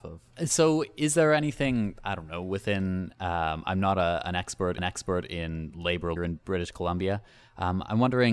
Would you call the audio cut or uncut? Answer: cut